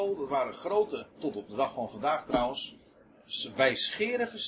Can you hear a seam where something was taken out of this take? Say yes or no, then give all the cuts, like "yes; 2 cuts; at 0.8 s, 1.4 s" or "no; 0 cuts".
yes; 1 cut; at 1.1 s